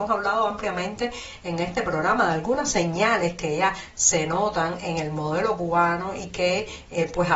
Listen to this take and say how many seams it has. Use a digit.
0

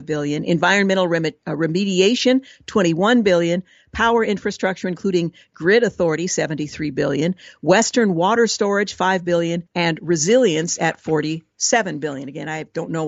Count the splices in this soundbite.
1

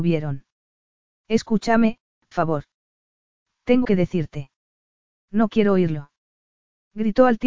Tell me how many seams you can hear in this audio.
2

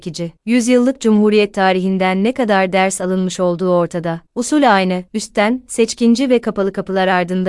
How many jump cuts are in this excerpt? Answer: 1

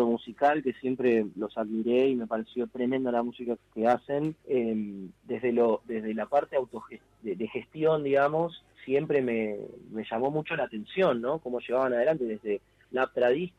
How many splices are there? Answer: 3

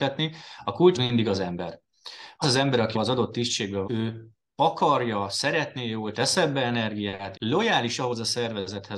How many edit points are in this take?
6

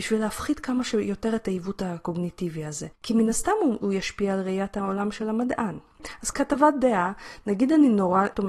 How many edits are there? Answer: 1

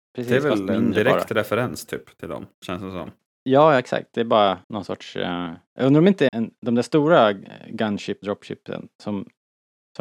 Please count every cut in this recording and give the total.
5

